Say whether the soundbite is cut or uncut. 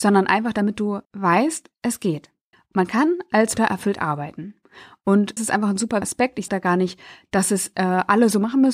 cut